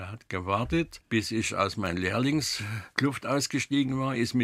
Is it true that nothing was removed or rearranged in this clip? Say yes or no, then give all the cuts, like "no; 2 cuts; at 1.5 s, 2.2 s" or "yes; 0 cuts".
yes; 0 cuts